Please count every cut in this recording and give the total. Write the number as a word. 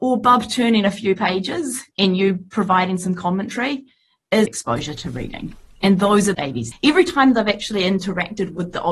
four